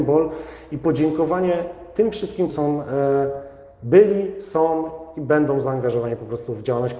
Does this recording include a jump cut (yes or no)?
yes